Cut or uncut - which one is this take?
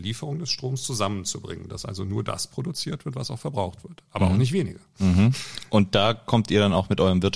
uncut